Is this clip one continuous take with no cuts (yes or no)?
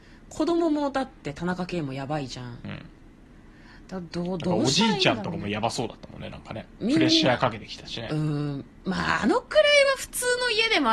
yes